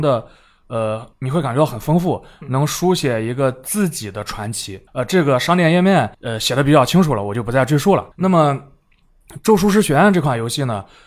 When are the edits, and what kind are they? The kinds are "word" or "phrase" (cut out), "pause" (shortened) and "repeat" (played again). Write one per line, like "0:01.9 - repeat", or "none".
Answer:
0:01.1 - pause
0:04.9 - pause
0:06.1 - pause
0:08.1 - pause